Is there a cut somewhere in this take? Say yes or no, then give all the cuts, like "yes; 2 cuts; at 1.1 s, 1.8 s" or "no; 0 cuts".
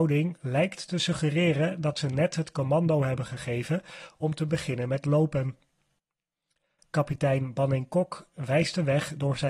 no; 0 cuts